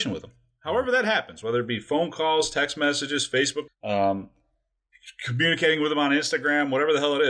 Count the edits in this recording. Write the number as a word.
one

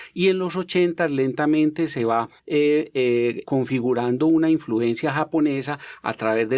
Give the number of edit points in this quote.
two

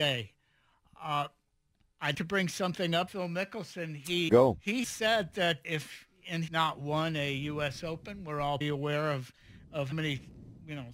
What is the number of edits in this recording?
eight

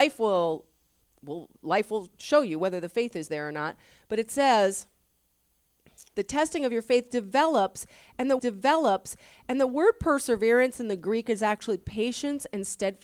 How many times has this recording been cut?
two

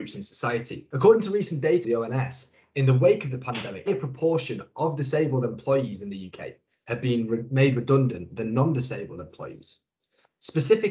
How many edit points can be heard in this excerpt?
two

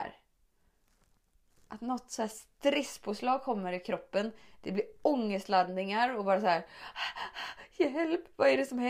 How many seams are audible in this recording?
zero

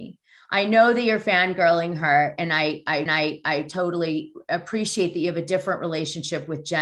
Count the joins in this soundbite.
one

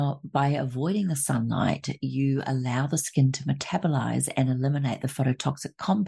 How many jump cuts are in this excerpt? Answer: zero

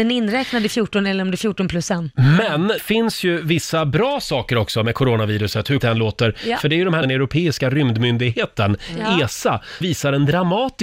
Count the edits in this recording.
four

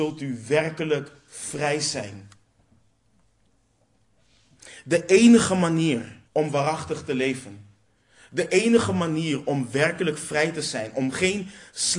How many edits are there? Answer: one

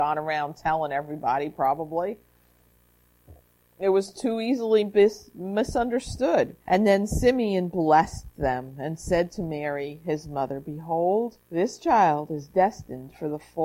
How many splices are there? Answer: two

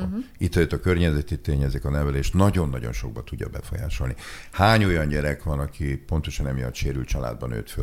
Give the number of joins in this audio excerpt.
zero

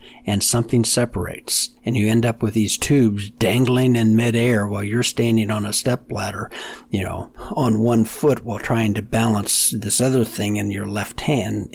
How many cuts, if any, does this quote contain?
one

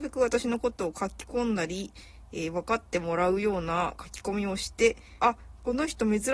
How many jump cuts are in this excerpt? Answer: one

